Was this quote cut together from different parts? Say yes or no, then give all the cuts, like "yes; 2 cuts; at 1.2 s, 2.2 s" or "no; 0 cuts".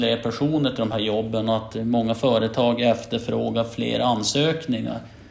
no; 0 cuts